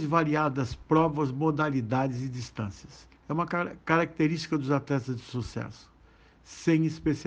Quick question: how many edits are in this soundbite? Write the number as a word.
one